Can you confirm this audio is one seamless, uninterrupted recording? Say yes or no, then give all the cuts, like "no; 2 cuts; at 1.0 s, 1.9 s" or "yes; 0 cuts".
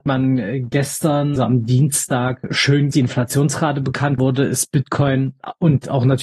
no; 3 cuts; at 1.4 s, 2.9 s, 4.2 s